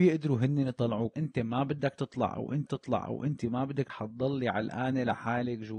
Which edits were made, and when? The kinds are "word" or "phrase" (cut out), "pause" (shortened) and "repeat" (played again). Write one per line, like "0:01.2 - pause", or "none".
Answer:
0:01.1 - word
0:02.7 - repeat
0:03.9 - word